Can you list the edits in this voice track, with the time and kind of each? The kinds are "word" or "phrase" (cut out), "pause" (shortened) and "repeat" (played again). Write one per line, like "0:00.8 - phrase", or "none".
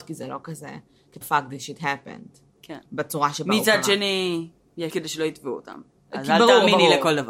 0:01.2 - word
0:02.9 - pause
0:04.9 - word
0:06.0 - pause